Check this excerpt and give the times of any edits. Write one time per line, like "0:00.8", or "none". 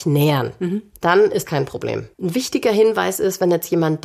0:01.4
0:02.1